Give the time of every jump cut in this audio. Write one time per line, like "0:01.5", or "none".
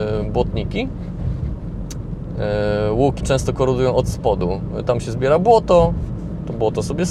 0:03.2

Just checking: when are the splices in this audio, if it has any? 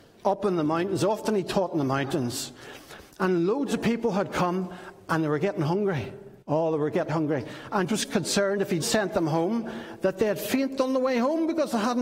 0:06.4
0:07.1
0:07.9
0:08.8

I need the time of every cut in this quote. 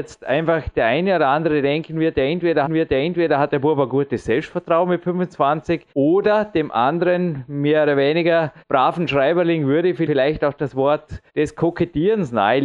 0:02.6
0:05.9
0:08.6
0:11.3

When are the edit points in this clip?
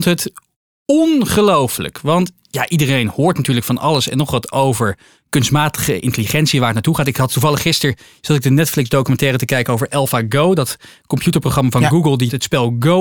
none

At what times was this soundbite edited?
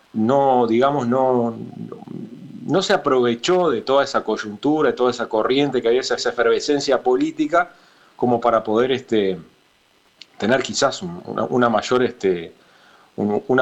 0:06.2

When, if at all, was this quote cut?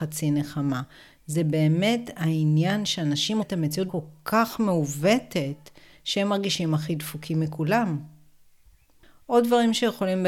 0:03.4
0:03.9

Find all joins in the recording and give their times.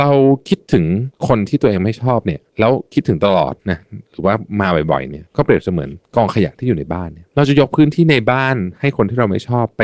0:02.5
0:03.6
0:06.0
0:07.3

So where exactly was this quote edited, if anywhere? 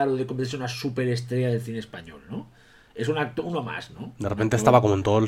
none

